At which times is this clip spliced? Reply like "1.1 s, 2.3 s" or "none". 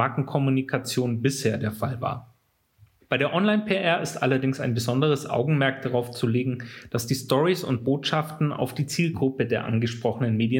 none